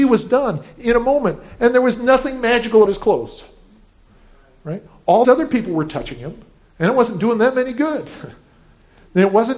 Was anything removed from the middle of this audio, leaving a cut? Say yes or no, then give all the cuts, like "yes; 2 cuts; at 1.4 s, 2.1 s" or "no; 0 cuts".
yes; 2 cuts; at 2.9 s, 5.2 s